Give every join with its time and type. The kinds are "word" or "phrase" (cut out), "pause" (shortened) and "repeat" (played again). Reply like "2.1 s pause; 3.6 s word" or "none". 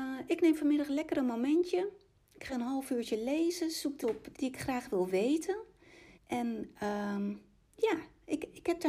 2.5 s word; 4.0 s word; 4.3 s word; 6.1 s pause